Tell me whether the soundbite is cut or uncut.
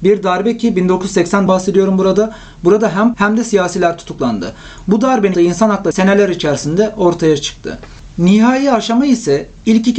cut